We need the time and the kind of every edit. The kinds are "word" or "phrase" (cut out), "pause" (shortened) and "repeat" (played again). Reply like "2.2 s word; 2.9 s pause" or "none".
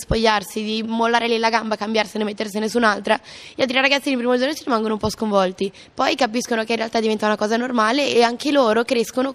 none